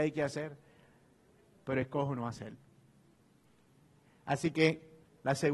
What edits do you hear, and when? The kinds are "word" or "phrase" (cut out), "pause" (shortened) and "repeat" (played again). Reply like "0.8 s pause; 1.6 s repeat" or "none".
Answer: none